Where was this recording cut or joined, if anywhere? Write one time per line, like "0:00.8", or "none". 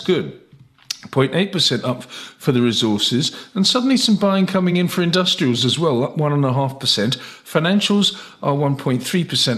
none